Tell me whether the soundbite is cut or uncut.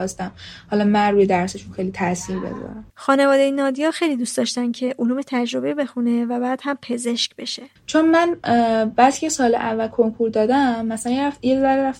cut